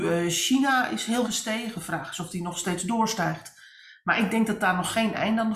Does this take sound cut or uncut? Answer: cut